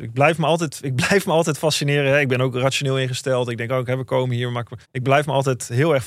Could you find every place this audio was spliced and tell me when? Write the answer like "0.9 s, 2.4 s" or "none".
4.8 s